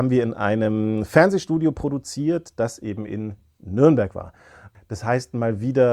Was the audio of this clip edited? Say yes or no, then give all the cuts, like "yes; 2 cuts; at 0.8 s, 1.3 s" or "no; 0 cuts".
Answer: no; 0 cuts